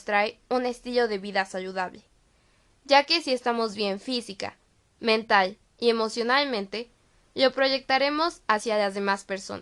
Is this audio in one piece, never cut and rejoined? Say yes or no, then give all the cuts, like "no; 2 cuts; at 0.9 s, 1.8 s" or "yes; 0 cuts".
yes; 0 cuts